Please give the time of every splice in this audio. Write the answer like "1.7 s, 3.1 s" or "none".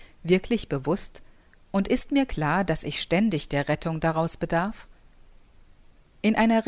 none